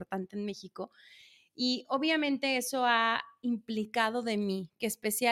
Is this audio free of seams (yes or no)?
yes